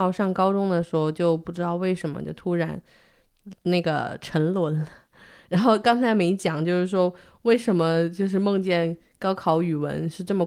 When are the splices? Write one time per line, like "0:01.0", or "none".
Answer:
none